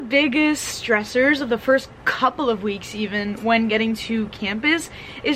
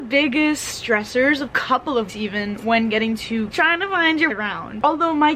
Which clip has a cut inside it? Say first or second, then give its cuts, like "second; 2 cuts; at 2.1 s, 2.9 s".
second; 4 cuts; at 1.5 s, 2.1 s, 3.5 s, 4.3 s